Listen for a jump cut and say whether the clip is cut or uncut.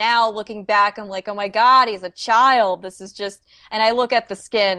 uncut